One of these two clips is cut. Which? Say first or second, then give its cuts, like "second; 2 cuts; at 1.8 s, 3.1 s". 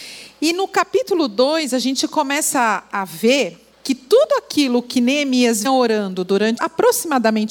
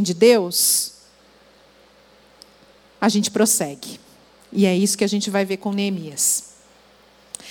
first; 3 cuts; at 3.7 s, 5.6 s, 6.6 s